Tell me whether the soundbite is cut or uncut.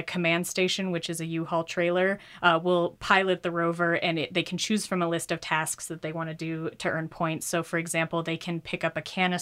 uncut